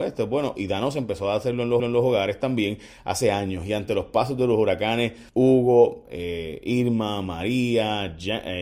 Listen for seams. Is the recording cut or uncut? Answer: cut